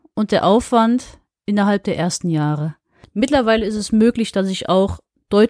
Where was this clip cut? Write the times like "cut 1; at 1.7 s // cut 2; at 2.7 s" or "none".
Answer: none